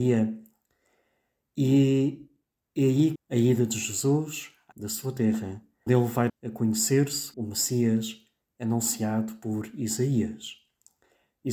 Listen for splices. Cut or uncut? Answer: cut